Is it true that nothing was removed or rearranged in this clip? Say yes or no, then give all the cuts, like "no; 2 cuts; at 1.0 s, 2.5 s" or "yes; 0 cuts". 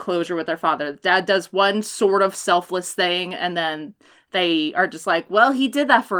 yes; 0 cuts